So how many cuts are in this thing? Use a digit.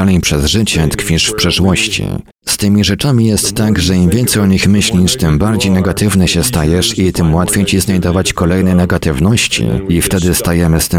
1